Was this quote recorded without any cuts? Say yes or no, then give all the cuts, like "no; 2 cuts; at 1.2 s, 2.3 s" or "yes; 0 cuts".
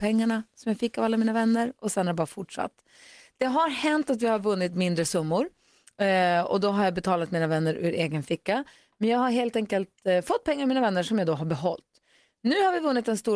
yes; 0 cuts